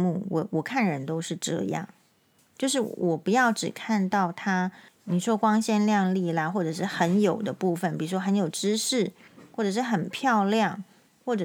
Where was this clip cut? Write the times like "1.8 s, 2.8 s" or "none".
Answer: 2.4 s, 4.9 s